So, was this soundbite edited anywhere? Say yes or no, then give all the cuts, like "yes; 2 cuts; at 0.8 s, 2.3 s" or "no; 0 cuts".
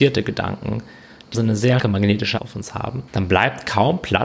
yes; 3 cuts; at 1.3 s, 1.8 s, 2.4 s